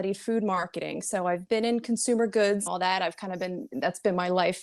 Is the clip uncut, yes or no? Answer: no